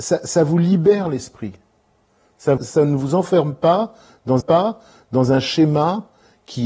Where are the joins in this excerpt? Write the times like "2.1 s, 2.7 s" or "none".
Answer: 2.6 s, 4.4 s